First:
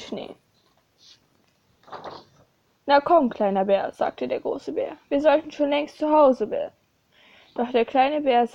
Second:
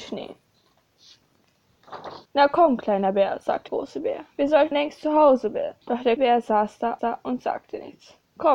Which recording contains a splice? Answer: second; 6 cuts; at 2.3 s, 3.7 s, 4.7 s, 5.8 s, 6.2 s, 7.0 s

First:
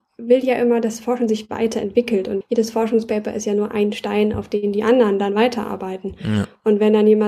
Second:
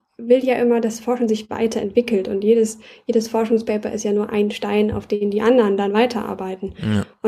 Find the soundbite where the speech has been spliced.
first; 1 cut; at 2.4 s

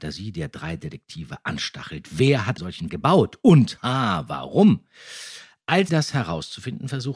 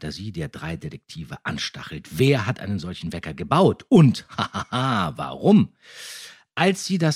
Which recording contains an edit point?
first; 4 cuts; at 2.6 s, 2.9 s, 3.8 s, 5.9 s

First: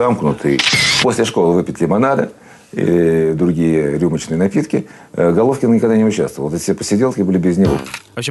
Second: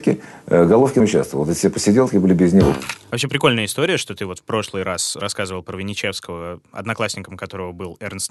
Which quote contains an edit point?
second; 1 cut; at 1.0 s

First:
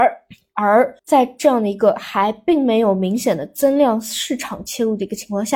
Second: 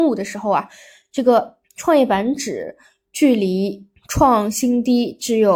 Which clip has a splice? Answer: first; 1 cut; at 1.0 s

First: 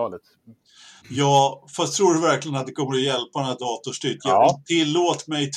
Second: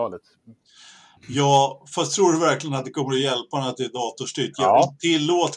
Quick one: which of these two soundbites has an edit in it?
first; 2 cuts; at 1.0 s, 3.6 s

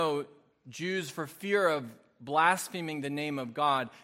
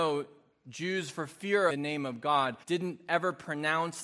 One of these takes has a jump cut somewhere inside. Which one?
second; 2 cuts; at 1.7 s, 2.6 s

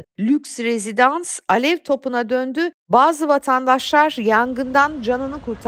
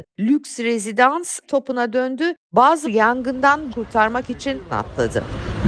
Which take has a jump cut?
second; 4 cuts; at 1.4 s, 2.8 s, 3.7 s, 4.7 s

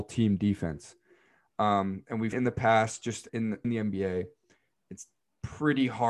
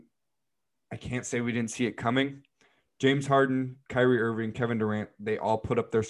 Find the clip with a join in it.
first; 3 cuts; at 2.3 s, 3.3 s, 3.6 s

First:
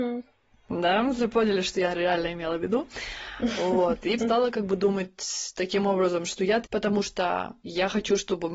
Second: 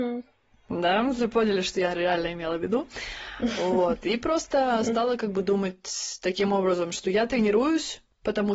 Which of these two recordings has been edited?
first; 3 cuts; at 4.2 s, 6.6 s, 7.6 s

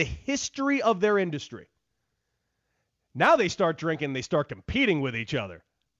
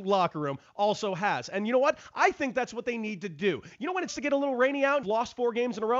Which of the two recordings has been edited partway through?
second; 2 cuts; at 4.1 s, 5.0 s

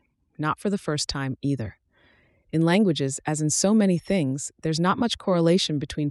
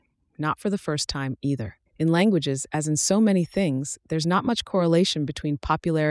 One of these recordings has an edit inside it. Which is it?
second; 1 cut; at 1.9 s

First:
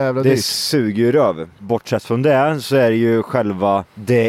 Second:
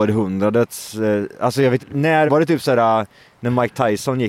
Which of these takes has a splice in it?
second; 2 cuts; at 1.8 s, 2.3 s

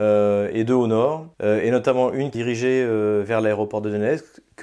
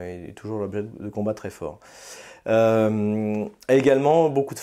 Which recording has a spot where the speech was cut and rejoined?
first; 2 cuts; at 1.3 s, 2.3 s

